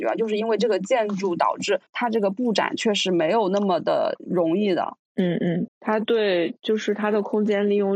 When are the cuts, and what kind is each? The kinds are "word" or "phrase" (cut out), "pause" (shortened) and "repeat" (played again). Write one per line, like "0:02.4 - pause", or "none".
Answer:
0:01.9 - pause
0:05.7 - phrase